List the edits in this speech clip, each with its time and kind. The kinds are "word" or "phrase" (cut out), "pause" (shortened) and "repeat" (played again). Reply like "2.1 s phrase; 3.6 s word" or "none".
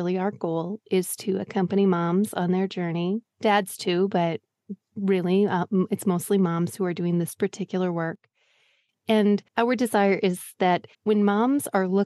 9.5 s pause; 10.9 s pause